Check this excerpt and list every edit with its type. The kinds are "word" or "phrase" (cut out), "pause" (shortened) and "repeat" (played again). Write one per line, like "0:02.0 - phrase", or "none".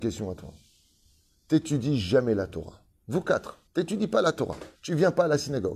0:03.7 - pause
0:04.8 - pause